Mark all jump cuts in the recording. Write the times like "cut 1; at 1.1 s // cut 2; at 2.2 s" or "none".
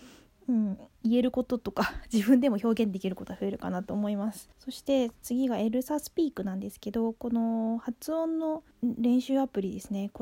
cut 1; at 0.9 s // cut 2; at 4.5 s // cut 3; at 8.7 s